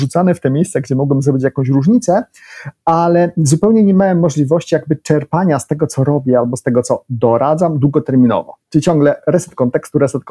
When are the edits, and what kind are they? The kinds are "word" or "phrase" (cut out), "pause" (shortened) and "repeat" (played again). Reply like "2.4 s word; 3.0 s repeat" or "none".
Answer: 8.6 s pause